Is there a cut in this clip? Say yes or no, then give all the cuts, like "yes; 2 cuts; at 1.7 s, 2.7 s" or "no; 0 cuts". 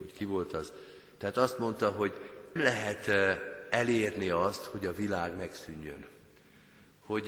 yes; 1 cut; at 2.6 s